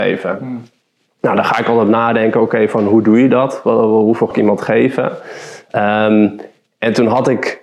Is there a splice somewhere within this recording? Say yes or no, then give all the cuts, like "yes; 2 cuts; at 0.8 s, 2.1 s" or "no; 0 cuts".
yes; 1 cut; at 4.3 s